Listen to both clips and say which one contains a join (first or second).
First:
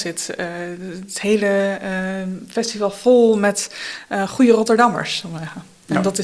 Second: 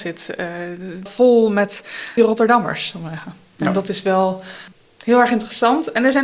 second